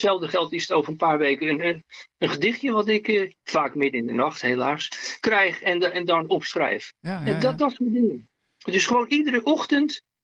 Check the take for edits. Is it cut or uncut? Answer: cut